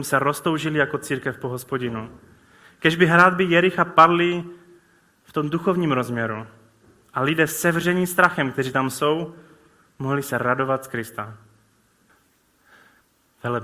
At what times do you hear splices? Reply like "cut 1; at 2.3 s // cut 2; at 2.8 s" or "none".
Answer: none